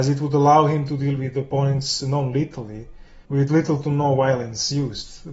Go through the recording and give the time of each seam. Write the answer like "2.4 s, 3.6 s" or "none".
3.2 s